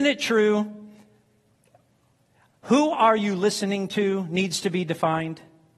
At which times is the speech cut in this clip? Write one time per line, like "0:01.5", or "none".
none